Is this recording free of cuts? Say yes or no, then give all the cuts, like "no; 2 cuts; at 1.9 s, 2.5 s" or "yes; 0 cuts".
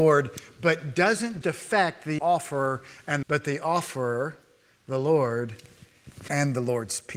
no; 3 cuts; at 1.4 s, 2.2 s, 3.2 s